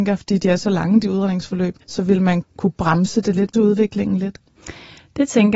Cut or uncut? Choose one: cut